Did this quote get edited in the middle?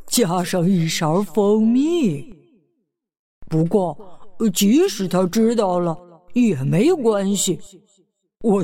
no; 0 cuts

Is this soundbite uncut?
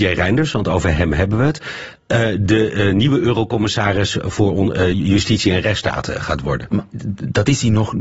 yes; 0 cuts

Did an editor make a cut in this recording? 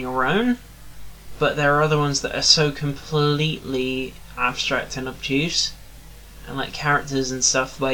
no; 0 cuts

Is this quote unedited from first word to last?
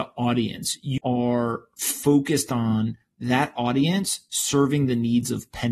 no; 1 cut; at 1.0 s

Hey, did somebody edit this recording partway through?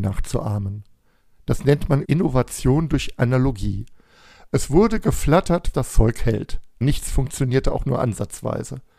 yes; 3 cuts; at 2.0 s, 5.7 s, 6.8 s

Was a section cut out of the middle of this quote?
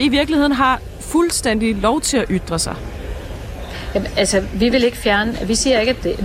no; 0 cuts

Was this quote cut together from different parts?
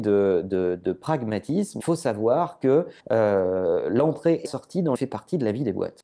yes; 4 cuts; at 1.8 s, 3.0 s, 4.5 s, 5.0 s

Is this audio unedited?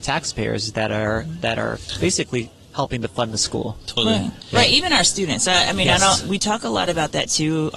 yes; 0 cuts

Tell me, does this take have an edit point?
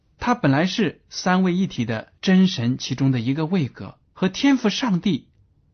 yes; 2 cuts; at 2.2 s, 4.0 s

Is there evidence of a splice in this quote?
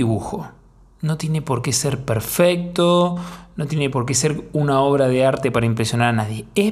no; 0 cuts

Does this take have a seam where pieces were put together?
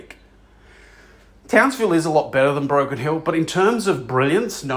no; 0 cuts

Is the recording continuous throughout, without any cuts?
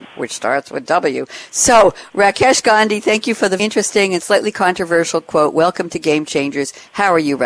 no; 1 cut; at 3.6 s

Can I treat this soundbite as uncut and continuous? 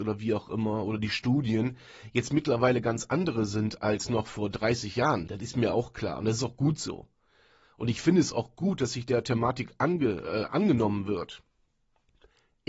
yes; 0 cuts

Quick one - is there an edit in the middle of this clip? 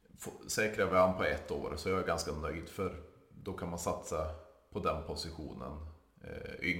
no; 0 cuts

